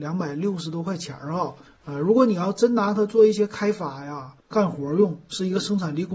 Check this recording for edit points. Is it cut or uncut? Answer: cut